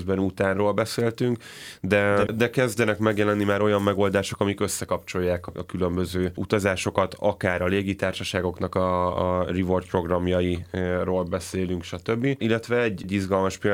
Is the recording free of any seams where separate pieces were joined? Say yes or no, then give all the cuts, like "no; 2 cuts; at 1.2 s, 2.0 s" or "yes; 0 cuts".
no; 1 cut; at 2.3 s